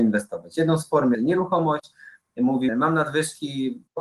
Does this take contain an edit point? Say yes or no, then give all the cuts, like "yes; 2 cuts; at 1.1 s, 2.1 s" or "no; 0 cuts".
yes; 2 cuts; at 1.1 s, 2.7 s